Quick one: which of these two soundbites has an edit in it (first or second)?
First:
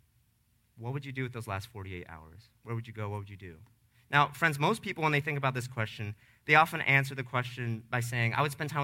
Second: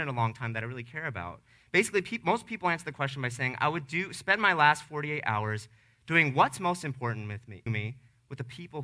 second